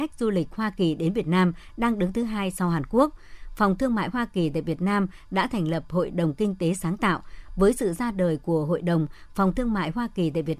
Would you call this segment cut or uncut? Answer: uncut